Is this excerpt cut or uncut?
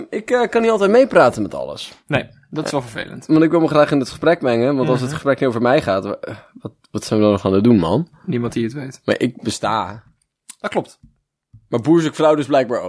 uncut